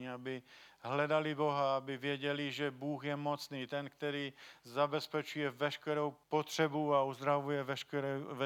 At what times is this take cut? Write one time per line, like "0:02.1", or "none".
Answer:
0:06.2